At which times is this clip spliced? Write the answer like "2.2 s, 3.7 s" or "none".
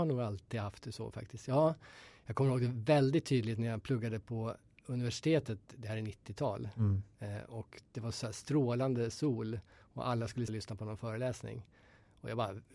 10.5 s